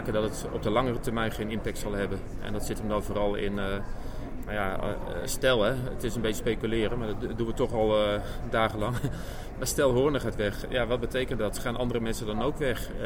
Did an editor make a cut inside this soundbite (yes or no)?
no